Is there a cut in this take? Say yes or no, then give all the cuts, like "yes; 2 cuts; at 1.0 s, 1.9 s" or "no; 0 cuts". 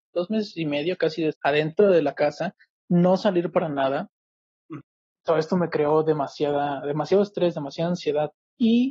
yes; 3 cuts; at 1.3 s, 2.8 s, 4.8 s